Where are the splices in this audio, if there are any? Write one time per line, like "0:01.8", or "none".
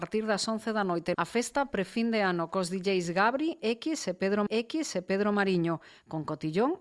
0:01.1
0:04.5